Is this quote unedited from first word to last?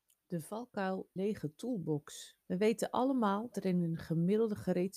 no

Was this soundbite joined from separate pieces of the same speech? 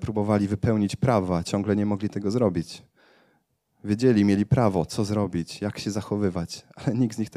no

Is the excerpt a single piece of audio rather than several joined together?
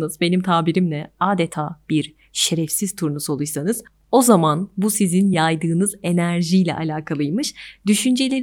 yes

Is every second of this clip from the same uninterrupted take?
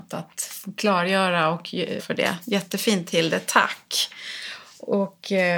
no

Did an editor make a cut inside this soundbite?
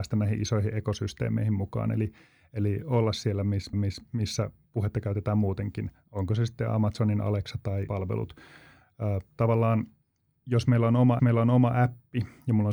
yes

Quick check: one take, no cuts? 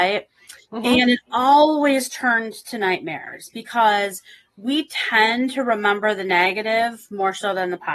yes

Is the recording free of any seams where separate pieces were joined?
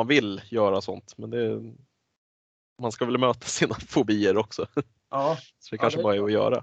yes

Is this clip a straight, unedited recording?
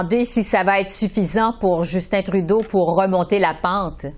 yes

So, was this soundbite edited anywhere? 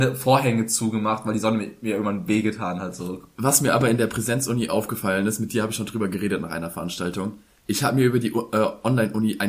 no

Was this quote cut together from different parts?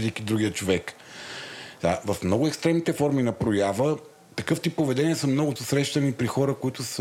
yes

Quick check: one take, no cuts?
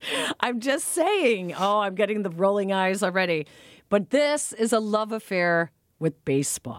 yes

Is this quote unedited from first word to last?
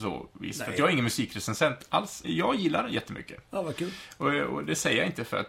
no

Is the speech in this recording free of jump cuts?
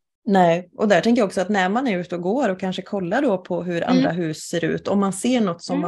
yes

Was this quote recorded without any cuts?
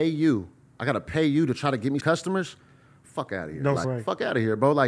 no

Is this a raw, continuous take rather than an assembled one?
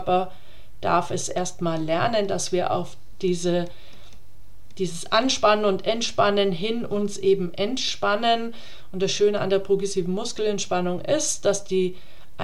yes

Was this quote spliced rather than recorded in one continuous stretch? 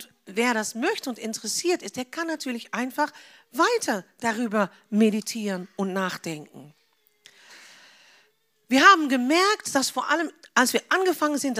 no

